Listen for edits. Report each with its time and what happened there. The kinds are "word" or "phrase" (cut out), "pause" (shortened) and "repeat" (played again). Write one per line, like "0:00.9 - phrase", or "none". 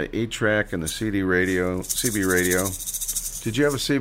none